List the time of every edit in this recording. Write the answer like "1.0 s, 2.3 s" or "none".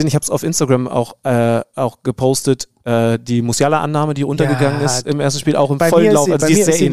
none